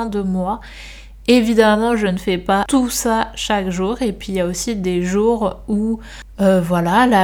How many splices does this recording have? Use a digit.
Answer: 0